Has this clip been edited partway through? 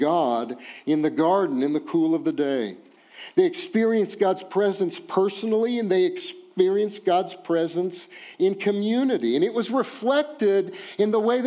no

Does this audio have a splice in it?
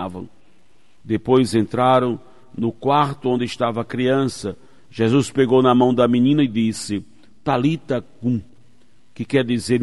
no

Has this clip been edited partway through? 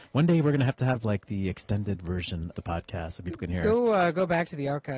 yes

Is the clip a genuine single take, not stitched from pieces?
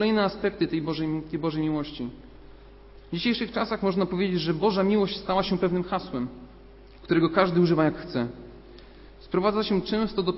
yes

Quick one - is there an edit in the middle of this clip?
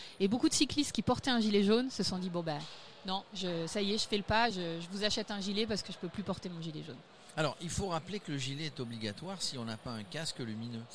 no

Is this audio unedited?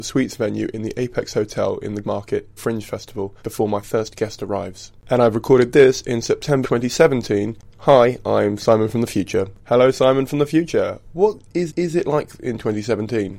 no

